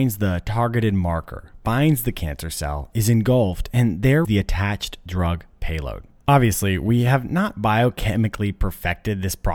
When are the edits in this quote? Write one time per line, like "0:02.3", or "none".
0:04.2
0:06.2